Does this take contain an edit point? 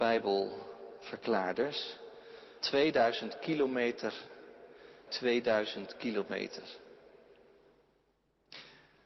yes; 2 cuts; at 2.6 s, 5.1 s

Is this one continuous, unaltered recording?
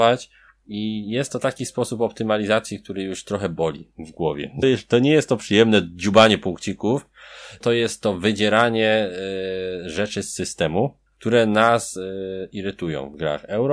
no; 3 cuts; at 4.6 s, 7.6 s, 11.1 s

